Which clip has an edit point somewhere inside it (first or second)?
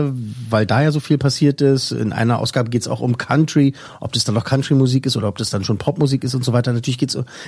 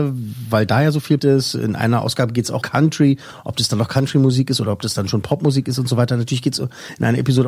second